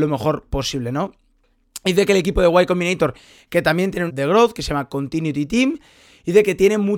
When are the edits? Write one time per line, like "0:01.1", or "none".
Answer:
0:04.1